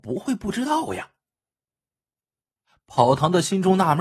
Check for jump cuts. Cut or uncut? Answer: uncut